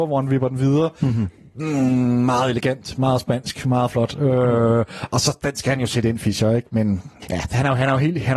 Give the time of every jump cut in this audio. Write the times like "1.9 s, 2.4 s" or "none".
none